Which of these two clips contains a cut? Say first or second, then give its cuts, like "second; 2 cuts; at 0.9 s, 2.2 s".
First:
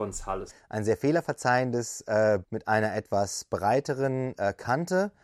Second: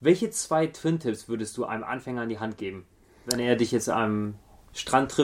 first; 1 cut; at 2.4 s